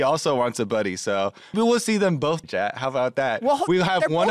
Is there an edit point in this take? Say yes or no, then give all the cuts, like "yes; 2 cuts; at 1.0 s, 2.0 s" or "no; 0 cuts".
yes; 2 cuts; at 1.5 s, 2.4 s